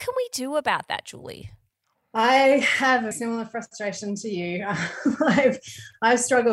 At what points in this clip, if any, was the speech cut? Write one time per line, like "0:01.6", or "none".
0:01.7
0:03.1